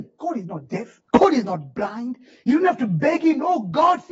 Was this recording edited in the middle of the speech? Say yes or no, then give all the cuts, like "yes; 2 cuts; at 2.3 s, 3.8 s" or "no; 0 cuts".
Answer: yes; 1 cut; at 1.1 s